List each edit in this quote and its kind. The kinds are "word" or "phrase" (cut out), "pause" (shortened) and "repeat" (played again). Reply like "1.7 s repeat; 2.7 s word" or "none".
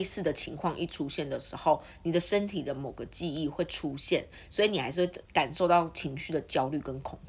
5.2 s pause